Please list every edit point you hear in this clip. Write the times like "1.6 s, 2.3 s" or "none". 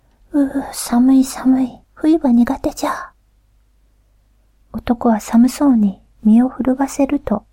1.8 s